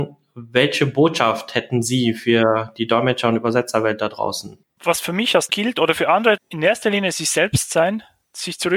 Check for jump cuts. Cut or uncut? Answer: cut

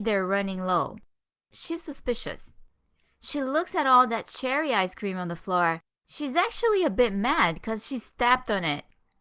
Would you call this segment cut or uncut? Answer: uncut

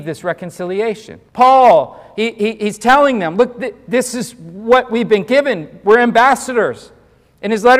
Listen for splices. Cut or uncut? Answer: cut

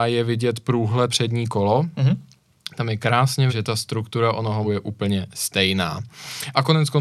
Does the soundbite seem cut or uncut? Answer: cut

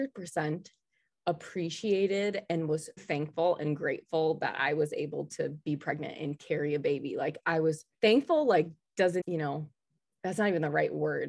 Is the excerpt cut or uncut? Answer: cut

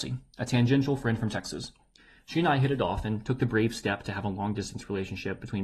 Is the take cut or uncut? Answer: uncut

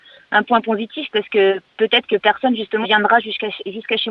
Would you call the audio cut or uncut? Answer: cut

